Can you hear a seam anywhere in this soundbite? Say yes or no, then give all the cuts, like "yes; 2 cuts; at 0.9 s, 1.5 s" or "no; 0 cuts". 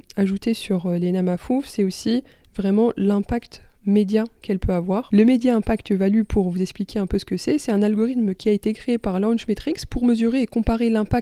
no; 0 cuts